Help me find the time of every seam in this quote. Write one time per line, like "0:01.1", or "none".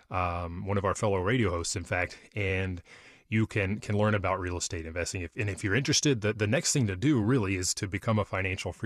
none